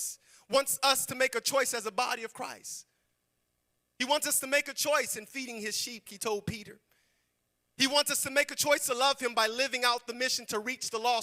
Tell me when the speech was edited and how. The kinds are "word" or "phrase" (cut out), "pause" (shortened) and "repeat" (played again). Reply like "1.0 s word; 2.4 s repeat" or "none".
6.1 s word